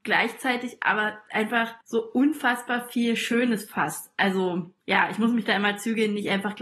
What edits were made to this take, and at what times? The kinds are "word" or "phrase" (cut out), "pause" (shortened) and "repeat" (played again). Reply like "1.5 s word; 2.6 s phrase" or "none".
1.8 s pause